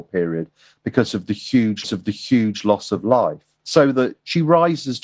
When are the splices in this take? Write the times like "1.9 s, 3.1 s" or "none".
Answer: 1.8 s, 3.6 s